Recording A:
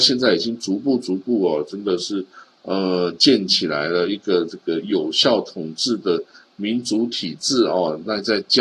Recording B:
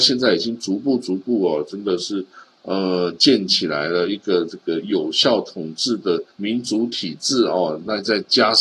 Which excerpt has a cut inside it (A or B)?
B